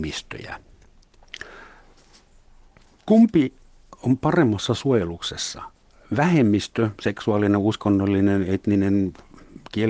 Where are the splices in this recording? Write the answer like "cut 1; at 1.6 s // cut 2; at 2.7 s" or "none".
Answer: none